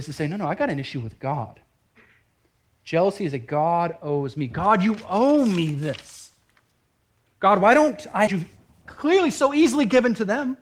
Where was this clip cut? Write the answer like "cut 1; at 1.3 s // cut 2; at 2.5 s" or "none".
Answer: cut 1; at 8.3 s